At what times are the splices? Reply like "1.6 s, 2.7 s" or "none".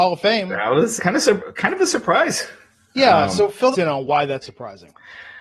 1.0 s, 3.7 s, 4.4 s